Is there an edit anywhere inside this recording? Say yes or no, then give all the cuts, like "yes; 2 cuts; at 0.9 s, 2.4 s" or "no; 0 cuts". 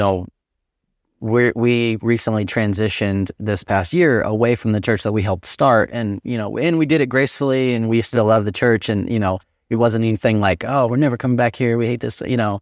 no; 0 cuts